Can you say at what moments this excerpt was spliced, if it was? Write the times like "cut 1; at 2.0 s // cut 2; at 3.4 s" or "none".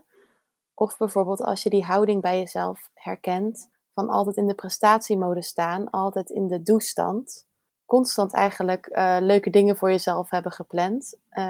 cut 1; at 3.7 s // cut 2; at 7.7 s